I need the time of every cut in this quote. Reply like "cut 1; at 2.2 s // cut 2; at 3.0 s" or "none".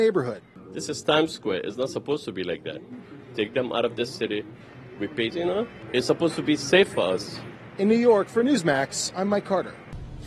cut 1; at 5.3 s